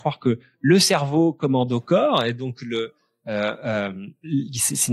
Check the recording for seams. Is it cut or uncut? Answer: uncut